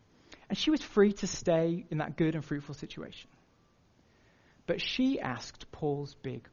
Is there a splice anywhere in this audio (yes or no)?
no